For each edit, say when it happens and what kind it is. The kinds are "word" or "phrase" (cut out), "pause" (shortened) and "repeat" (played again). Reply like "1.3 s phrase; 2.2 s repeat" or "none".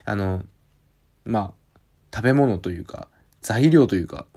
none